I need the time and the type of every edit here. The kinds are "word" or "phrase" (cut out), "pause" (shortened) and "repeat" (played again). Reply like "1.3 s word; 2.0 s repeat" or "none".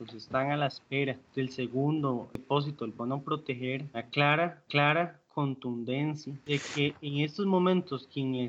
3.9 s word; 4.7 s repeat